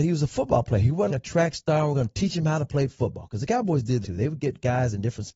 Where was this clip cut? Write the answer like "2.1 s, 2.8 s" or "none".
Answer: 1.1 s, 4.0 s